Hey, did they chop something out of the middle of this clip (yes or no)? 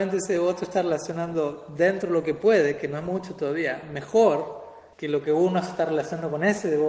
yes